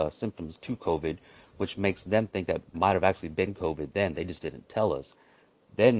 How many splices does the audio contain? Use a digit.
1